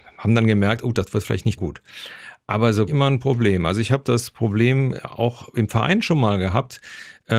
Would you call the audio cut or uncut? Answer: cut